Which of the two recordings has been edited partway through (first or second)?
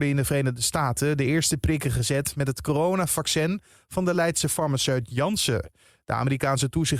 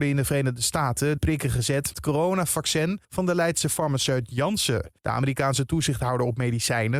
second